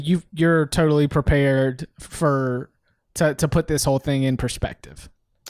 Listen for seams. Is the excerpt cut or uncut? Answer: uncut